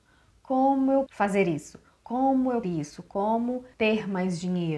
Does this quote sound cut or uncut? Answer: cut